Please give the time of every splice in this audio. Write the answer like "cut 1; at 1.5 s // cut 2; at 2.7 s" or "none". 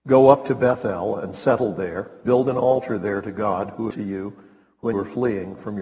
cut 1; at 2.2 s // cut 2; at 3.9 s // cut 3; at 4.9 s